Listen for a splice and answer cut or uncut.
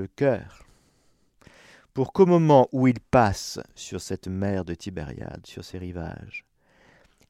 uncut